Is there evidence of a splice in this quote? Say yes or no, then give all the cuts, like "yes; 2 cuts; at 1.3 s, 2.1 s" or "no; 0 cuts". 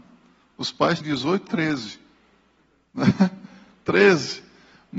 yes; 2 cuts; at 1.0 s, 1.5 s